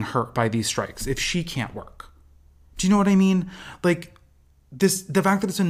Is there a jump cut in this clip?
no; 0 cuts

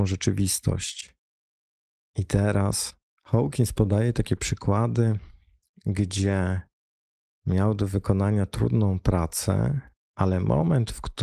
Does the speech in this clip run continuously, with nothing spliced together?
yes; 0 cuts

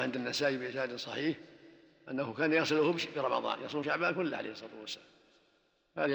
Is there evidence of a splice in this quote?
no; 0 cuts

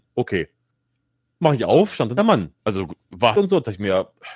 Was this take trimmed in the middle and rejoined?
yes; 3 cuts; at 2.2 s, 2.6 s, 3.3 s

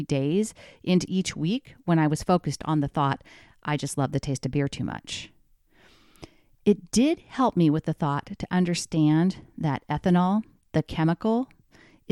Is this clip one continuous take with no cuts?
yes; 0 cuts

